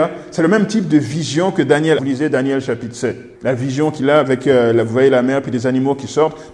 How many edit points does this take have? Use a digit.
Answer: 2